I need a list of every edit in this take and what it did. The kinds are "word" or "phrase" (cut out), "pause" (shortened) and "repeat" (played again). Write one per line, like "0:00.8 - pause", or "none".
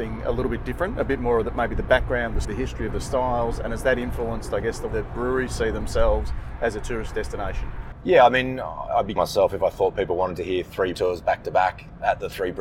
0:02.4 - word
0:04.9 - word
0:09.2 - word
0:10.9 - word